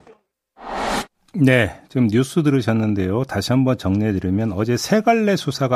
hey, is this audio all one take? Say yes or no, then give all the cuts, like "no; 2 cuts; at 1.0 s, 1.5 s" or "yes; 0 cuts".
yes; 0 cuts